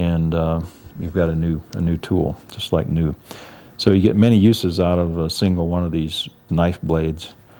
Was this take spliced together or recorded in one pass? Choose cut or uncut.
cut